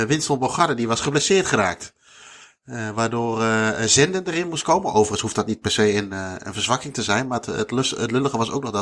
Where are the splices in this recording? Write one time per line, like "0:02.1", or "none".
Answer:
none